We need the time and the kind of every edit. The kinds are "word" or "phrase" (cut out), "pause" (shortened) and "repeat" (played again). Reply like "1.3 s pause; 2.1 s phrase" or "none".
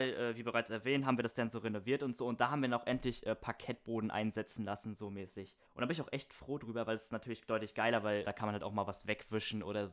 5.7 s pause; 8.2 s word